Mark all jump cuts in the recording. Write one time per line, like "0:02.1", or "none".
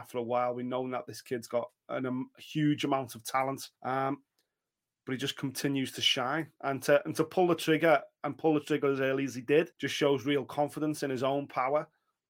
0:03.8
0:09.7